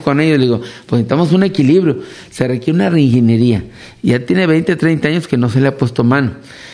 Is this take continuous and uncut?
yes; 0 cuts

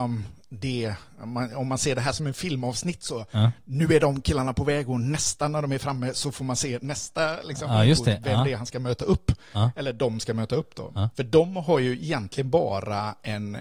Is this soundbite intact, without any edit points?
yes; 0 cuts

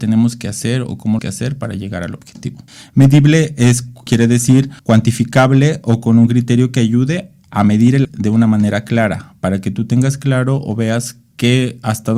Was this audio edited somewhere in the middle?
yes; 5 cuts; at 1.2 s, 2.7 s, 4.1 s, 4.8 s, 8.0 s

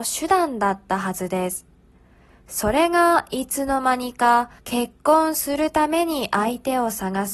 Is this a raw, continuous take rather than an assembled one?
no; 1 cut; at 4.6 s

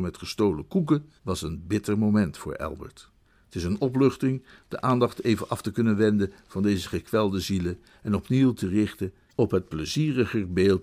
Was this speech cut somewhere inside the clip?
yes; 2 cuts; at 1.2 s, 3.2 s

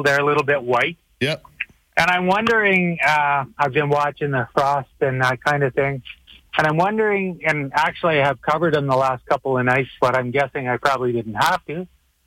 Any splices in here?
no; 0 cuts

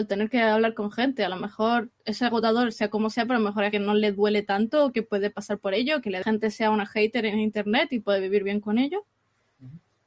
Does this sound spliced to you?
yes; 2 cuts; at 3.7 s, 6.2 s

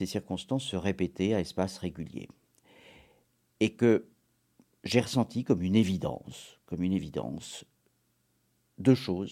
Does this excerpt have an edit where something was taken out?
no; 0 cuts

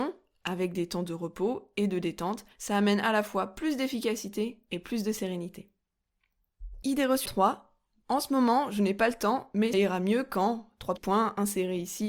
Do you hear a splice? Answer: yes; 4 cuts; at 2.5 s, 7.3 s, 9.7 s, 11.0 s

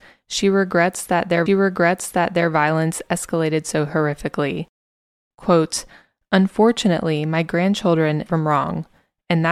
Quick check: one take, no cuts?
no; 2 cuts; at 1.5 s, 8.3 s

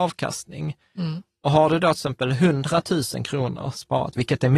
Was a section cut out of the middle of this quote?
no; 0 cuts

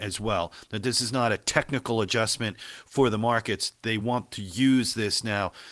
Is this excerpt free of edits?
yes; 0 cuts

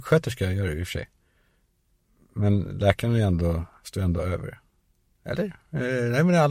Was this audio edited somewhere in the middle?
no; 0 cuts

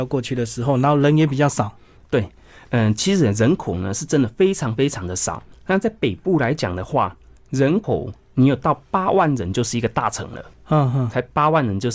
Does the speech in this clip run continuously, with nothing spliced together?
yes; 0 cuts

